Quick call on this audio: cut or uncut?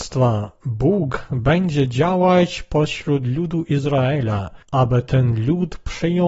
cut